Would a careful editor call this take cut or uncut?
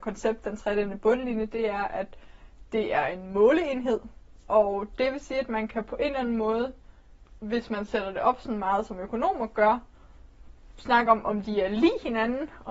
uncut